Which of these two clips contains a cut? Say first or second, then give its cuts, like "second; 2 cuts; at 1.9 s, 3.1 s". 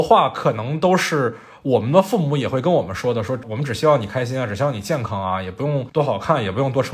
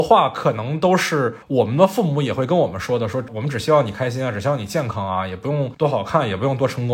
second; 1 cut; at 1.4 s